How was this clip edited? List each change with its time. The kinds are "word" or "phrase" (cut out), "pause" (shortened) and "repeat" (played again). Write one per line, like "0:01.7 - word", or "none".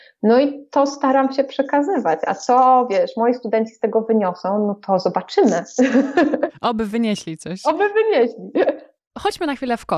none